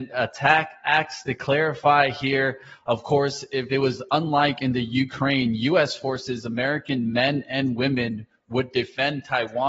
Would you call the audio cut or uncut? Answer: uncut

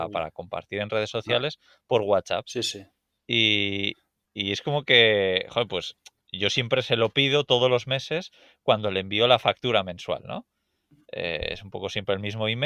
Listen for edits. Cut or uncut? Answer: uncut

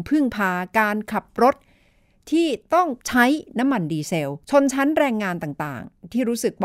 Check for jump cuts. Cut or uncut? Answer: cut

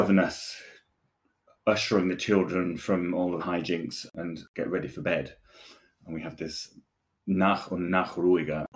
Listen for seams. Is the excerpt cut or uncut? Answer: cut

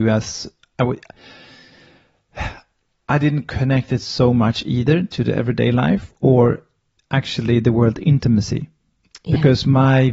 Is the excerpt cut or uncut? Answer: uncut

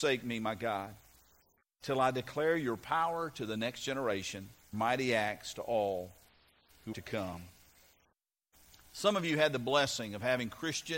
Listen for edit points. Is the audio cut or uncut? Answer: cut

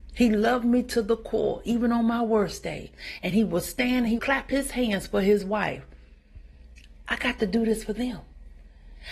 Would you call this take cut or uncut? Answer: cut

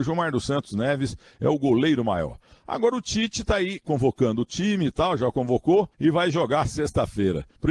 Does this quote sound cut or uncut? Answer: uncut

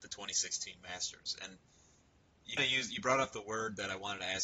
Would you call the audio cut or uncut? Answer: cut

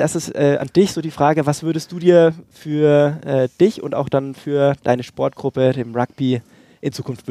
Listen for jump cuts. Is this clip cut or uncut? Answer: uncut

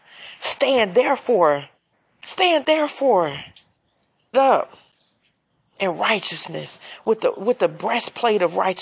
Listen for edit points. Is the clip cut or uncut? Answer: cut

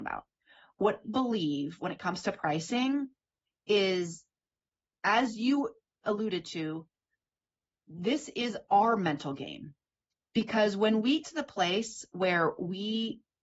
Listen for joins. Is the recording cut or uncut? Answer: cut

